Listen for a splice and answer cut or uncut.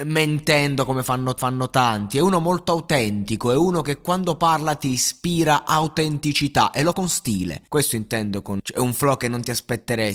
cut